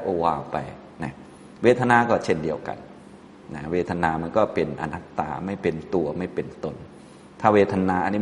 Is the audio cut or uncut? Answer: uncut